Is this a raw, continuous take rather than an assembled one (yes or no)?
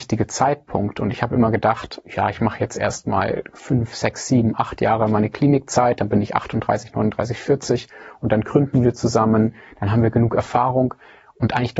yes